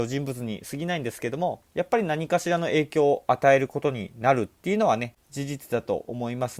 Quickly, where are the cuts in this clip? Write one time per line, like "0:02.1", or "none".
0:01.7
0:05.2